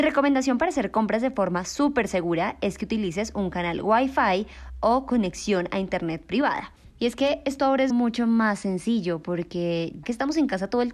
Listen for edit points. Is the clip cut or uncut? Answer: cut